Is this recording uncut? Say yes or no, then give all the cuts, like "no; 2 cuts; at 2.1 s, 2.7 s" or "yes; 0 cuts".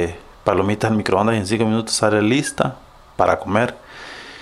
yes; 0 cuts